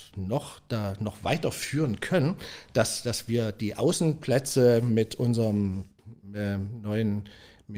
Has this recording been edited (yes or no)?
no